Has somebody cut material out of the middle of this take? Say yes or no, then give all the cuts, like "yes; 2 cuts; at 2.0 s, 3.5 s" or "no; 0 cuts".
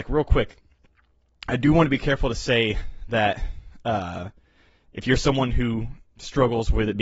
no; 0 cuts